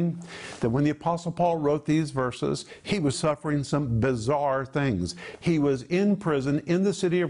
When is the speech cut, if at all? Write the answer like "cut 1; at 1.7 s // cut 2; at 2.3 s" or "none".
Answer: cut 1; at 3.1 s